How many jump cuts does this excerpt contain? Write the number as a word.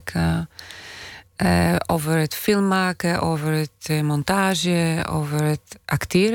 zero